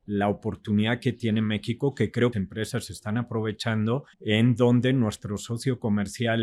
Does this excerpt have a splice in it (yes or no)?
yes